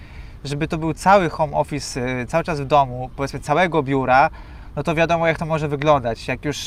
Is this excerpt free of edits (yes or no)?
yes